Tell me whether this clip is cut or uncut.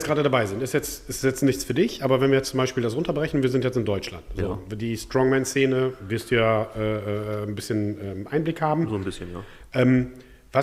uncut